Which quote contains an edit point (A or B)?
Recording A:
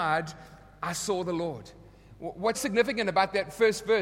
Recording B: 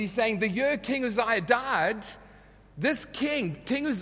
A